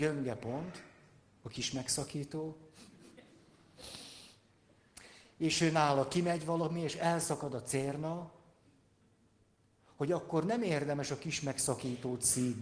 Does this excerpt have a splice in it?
no; 0 cuts

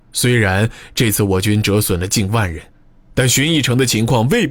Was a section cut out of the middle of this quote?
no; 0 cuts

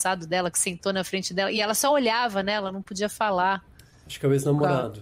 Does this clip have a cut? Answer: no; 0 cuts

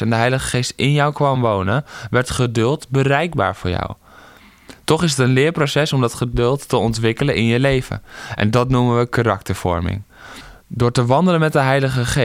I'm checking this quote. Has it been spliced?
no; 0 cuts

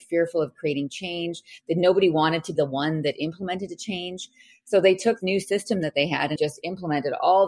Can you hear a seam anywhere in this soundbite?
yes; 3 cuts; at 2.6 s, 5.2 s, 6.4 s

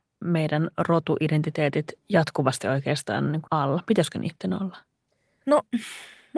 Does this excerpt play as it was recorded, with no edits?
no; 2 cuts; at 2.0 s, 3.5 s

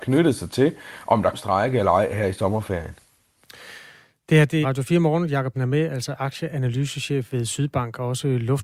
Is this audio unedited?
no; 3 cuts; at 1.3 s, 4.6 s, 5.5 s

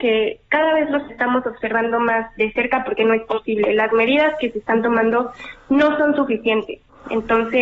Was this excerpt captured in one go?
yes; 0 cuts

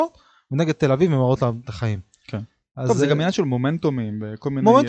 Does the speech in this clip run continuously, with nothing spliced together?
yes; 0 cuts

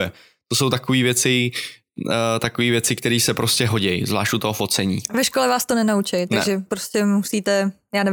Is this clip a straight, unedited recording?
yes; 0 cuts

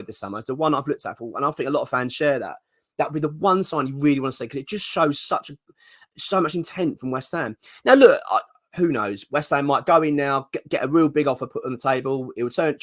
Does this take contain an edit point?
no; 0 cuts

